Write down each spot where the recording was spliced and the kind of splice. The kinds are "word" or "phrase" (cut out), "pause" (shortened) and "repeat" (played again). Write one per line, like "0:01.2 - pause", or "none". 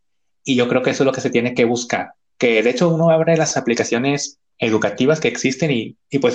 none